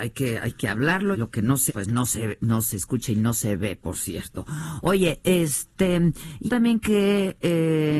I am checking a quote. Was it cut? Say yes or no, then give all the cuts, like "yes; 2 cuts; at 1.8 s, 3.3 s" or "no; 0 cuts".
yes; 4 cuts; at 1.1 s, 1.7 s, 3.8 s, 6.5 s